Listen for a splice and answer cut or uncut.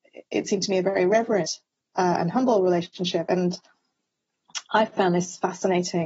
uncut